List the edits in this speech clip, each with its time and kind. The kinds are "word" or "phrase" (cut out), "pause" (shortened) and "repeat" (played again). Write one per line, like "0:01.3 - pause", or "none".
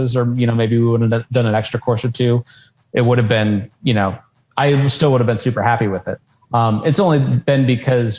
none